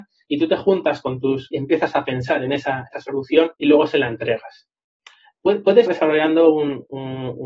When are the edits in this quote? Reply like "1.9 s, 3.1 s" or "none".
1.5 s, 2.9 s, 3.6 s, 5.9 s